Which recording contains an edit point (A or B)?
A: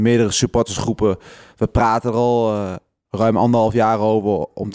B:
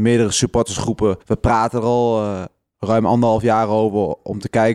B